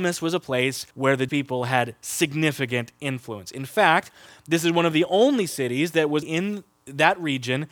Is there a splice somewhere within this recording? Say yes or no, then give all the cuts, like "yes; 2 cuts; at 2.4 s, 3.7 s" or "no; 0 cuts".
yes; 3 cuts; at 0.9 s, 1.3 s, 6.2 s